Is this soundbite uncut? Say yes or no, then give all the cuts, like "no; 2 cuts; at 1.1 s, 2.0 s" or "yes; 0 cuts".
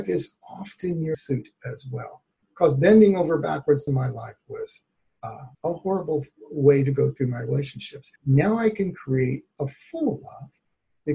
no; 4 cuts; at 1.1 s, 3.9 s, 5.5 s, 8.2 s